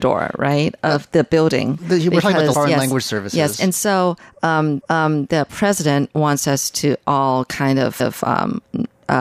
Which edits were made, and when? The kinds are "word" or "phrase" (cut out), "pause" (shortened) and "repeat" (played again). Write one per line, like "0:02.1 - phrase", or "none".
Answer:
0:02.5 - phrase
0:04.8 - repeat
0:08.0 - repeat